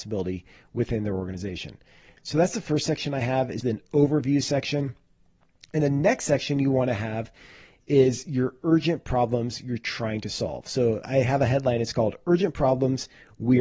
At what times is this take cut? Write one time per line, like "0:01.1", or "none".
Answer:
0:03.6
0:05.8

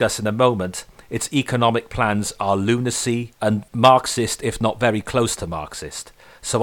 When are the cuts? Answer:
none

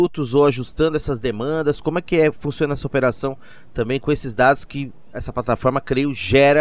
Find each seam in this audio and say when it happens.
none

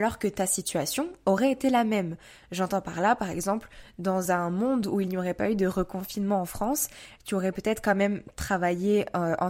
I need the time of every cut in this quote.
none

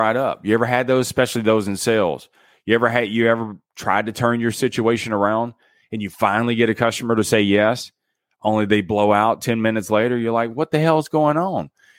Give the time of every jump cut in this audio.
none

